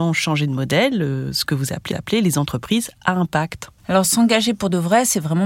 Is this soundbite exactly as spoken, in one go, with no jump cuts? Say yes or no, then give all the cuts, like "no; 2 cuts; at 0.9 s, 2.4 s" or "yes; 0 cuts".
no; 2 cuts; at 1.9 s, 3.8 s